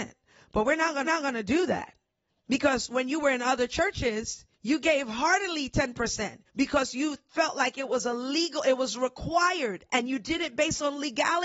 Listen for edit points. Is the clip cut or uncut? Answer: cut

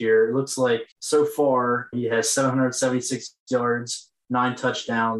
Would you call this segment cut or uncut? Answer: cut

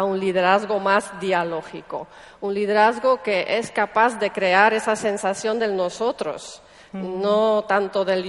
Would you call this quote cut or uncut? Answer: uncut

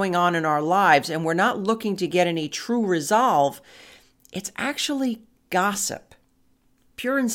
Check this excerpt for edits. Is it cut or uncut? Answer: uncut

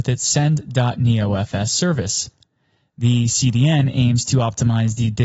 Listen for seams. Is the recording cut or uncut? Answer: uncut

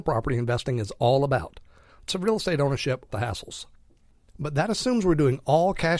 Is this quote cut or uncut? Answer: cut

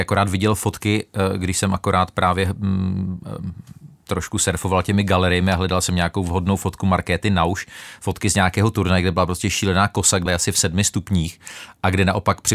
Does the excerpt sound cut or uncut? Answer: cut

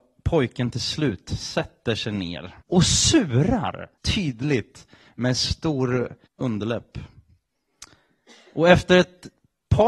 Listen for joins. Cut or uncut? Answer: cut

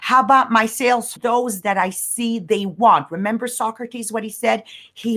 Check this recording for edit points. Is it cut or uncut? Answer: cut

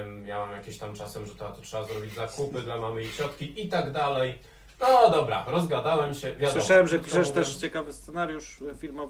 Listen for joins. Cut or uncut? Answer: uncut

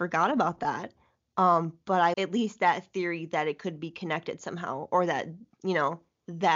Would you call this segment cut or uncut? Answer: cut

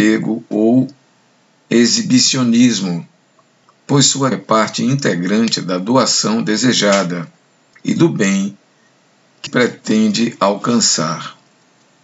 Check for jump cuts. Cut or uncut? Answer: cut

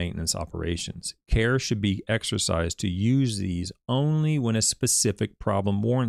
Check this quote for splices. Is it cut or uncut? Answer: uncut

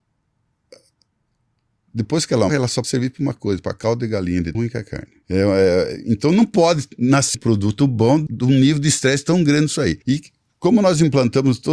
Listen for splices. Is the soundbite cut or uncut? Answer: cut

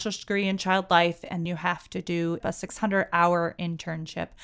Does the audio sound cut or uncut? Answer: cut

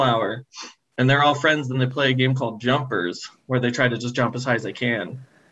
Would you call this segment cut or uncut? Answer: uncut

